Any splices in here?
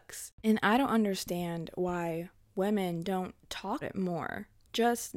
yes; 1 cut; at 3.8 s

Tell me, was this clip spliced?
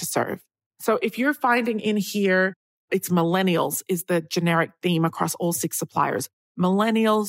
no; 0 cuts

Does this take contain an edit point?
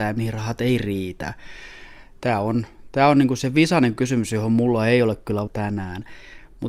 yes; 1 cut; at 5.5 s

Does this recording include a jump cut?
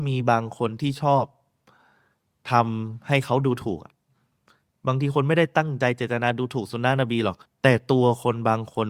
yes; 1 cut; at 7.4 s

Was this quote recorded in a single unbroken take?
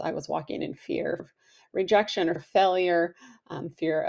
no; 2 cuts; at 1.2 s, 2.4 s

